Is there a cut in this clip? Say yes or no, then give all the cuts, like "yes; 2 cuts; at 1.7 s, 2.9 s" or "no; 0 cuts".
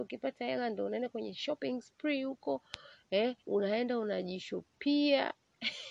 yes; 1 cut; at 3.4 s